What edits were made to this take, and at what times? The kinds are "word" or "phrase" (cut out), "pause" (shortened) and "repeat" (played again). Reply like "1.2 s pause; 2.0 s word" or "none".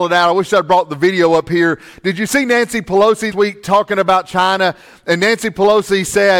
3.3 s word